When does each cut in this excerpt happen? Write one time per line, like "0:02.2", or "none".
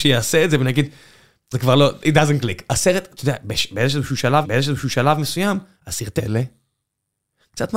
0:01.5
0:04.4
0:06.2